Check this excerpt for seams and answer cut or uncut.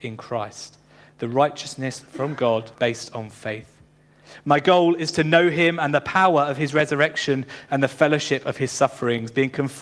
cut